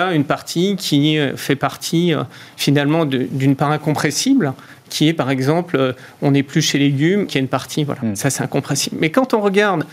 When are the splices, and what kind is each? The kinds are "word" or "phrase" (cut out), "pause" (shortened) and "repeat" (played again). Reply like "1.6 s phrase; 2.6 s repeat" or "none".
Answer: 7.3 s word